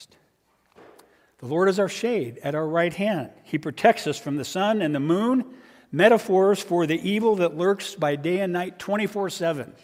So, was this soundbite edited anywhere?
no; 0 cuts

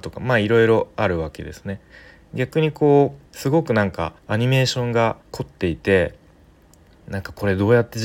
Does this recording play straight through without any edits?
no; 3 cuts; at 3.3 s, 4.2 s, 5.2 s

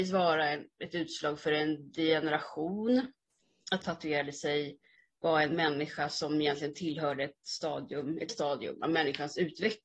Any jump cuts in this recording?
yes; 2 cuts; at 3.8 s, 8.3 s

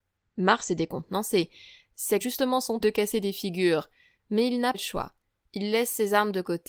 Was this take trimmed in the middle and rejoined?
yes; 3 cuts; at 2.2 s, 2.8 s, 4.7 s

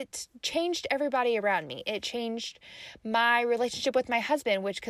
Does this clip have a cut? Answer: no; 0 cuts

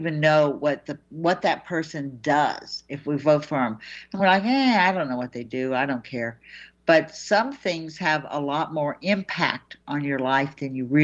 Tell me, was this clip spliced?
no; 0 cuts

